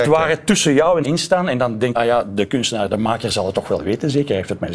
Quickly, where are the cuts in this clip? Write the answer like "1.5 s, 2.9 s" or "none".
1.0 s, 1.9 s

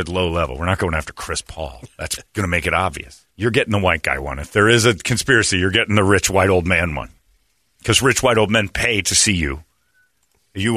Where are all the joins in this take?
3.3 s, 7.2 s

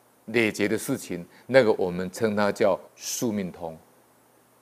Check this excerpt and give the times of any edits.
2.9 s

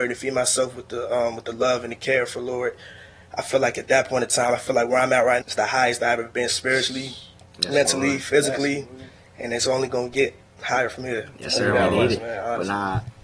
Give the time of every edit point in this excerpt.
5.4 s

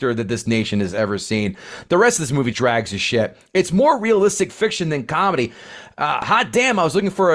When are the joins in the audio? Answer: 2.5 s

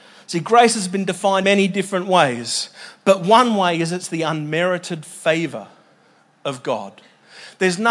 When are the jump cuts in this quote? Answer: 1.4 s

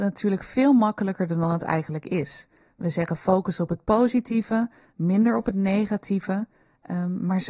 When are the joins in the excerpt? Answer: none

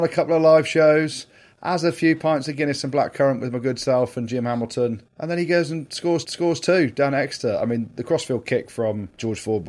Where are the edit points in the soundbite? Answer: 6.2 s

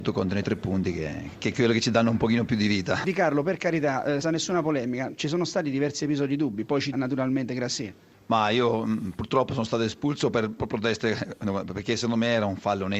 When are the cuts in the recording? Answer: 1.4 s, 4.2 s, 6.9 s, 10.6 s

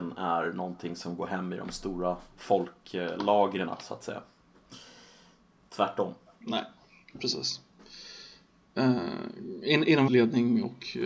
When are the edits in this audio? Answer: 10.1 s

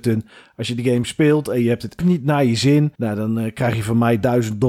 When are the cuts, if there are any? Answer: 2.0 s, 2.9 s

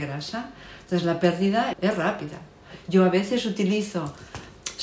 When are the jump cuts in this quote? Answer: 1.7 s

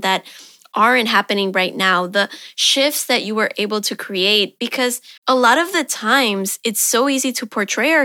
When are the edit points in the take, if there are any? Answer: 5.2 s

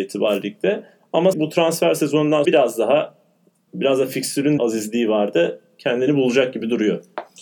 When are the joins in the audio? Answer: 1.3 s, 2.4 s, 3.7 s, 4.6 s

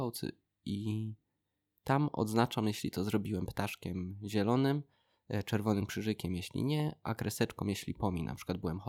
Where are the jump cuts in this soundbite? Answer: none

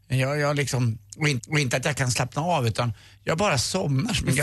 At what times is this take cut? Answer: 1.4 s

